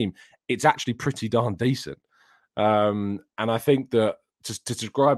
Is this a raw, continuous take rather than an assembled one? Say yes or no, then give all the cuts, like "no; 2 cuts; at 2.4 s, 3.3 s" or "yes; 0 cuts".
yes; 0 cuts